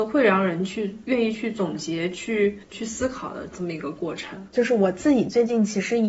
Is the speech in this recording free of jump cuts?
no; 1 cut; at 2.6 s

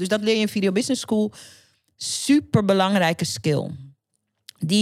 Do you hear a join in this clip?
no; 0 cuts

